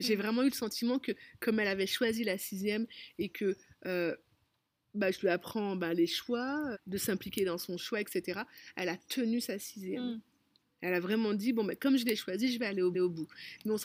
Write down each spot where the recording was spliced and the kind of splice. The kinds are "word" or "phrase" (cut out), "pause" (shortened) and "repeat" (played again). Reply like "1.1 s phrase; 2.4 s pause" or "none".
6.7 s word; 12.9 s repeat